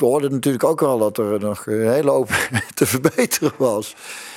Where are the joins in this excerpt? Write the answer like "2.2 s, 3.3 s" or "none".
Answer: none